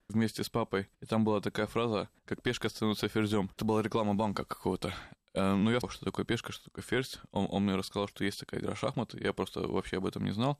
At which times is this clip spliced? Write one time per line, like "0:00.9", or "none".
0:00.9
0:02.2
0:03.5
0:05.8